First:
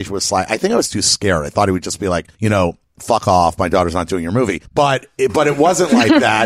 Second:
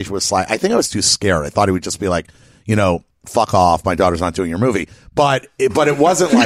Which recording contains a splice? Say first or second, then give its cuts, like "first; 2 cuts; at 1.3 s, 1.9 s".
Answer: first; 2 cuts; at 2.3 s, 4.7 s